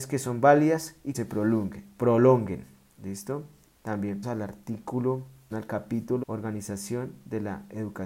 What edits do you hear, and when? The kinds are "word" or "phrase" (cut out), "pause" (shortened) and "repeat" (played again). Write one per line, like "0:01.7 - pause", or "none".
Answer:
0:01.1 - word
0:04.2 - word
0:05.5 - word
0:06.2 - word